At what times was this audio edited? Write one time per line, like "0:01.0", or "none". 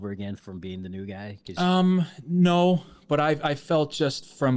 none